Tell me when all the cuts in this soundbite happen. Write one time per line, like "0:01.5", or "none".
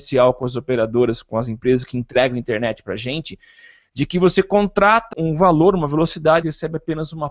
0:05.1
0:06.4